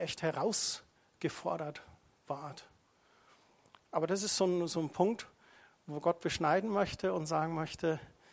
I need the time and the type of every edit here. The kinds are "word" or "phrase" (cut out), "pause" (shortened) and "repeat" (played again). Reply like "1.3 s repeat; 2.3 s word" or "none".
none